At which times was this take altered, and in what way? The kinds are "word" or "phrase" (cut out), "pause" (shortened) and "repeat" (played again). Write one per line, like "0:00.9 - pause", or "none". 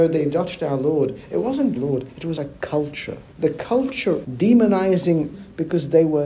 0:01.8 - phrase
0:02.4 - word
0:03.3 - pause
0:04.2 - word
0:05.3 - word